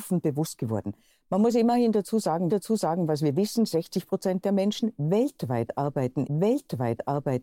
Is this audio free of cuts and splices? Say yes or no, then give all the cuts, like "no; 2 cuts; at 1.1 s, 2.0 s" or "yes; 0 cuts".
no; 2 cuts; at 2.5 s, 6.3 s